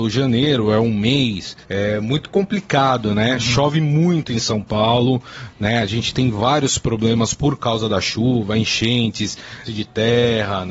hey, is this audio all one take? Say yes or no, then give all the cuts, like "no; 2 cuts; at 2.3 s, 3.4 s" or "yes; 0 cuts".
no; 2 cuts; at 1.6 s, 9.7 s